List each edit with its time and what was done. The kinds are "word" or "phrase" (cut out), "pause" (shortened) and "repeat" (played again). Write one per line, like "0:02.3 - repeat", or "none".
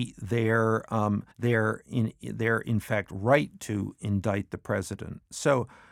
0:01.3 - pause